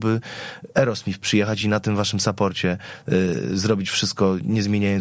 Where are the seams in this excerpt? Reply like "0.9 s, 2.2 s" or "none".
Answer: none